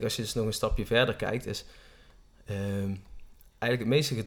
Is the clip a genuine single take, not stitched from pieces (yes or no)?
yes